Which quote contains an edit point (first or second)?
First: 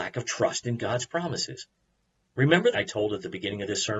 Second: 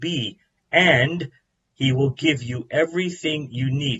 first